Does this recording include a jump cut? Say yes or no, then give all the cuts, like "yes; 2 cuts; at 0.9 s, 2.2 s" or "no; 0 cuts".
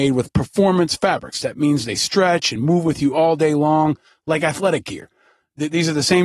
no; 0 cuts